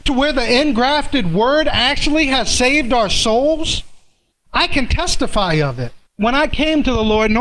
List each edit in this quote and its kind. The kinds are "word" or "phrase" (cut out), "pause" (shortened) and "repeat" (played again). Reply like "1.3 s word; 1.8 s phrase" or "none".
4.3 s pause; 6.1 s pause